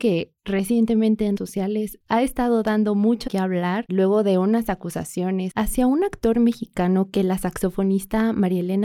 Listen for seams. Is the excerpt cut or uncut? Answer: cut